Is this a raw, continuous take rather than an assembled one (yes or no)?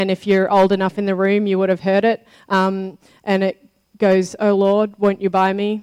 yes